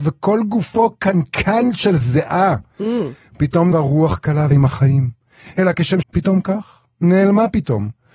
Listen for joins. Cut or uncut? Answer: cut